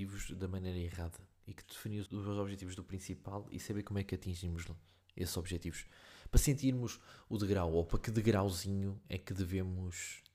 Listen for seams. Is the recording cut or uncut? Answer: cut